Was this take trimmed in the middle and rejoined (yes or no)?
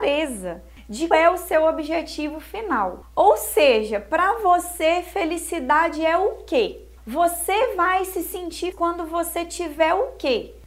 yes